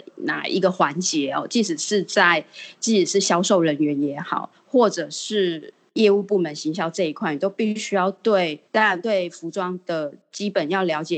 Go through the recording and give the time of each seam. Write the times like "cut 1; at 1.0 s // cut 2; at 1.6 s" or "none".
cut 1; at 8.7 s

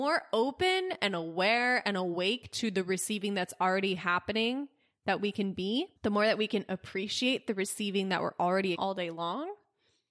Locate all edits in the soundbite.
cut 1; at 6.0 s // cut 2; at 8.7 s

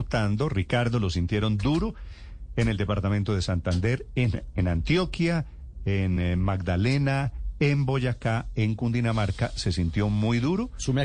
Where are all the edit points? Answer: none

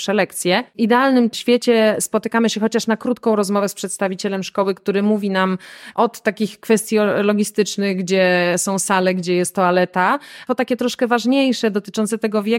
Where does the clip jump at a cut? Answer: none

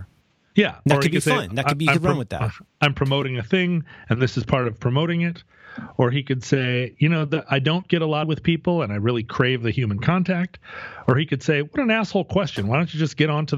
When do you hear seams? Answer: cut 1; at 8.2 s

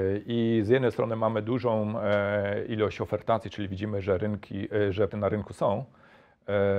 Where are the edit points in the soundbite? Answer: cut 1; at 5.1 s

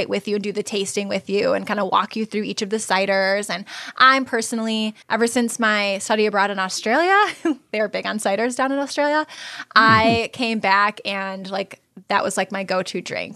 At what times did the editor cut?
cut 1; at 5.0 s

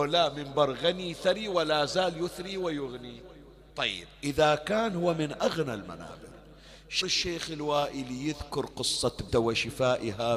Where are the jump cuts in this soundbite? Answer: cut 1; at 3.7 s // cut 2; at 7.0 s // cut 3; at 9.3 s

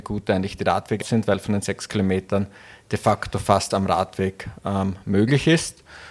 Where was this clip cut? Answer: cut 1; at 1.0 s // cut 2; at 3.7 s

